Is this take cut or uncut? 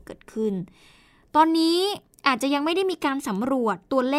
uncut